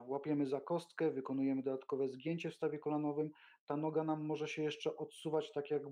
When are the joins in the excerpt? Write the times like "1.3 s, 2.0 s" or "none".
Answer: none